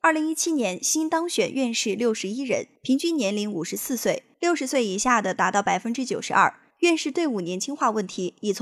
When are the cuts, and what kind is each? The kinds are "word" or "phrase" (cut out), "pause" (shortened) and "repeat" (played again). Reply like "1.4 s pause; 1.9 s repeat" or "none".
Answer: 2.8 s pause; 4.3 s pause; 6.7 s pause